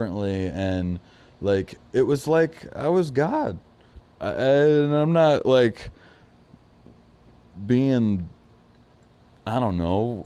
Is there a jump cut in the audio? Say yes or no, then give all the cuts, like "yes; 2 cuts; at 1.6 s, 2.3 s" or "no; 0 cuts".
no; 0 cuts